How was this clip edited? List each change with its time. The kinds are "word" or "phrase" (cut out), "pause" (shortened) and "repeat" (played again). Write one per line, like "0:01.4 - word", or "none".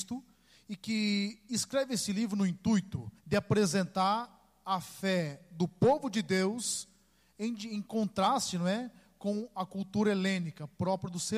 0:03.2 - pause